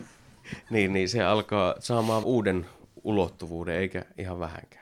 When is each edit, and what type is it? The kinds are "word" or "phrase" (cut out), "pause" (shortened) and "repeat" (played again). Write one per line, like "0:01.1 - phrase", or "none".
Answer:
0:02.2 - word